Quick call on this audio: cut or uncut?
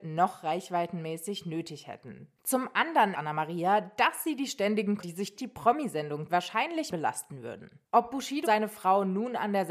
cut